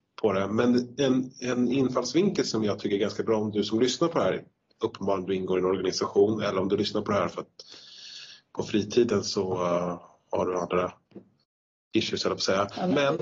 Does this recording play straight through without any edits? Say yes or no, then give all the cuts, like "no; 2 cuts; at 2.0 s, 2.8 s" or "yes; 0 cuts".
yes; 0 cuts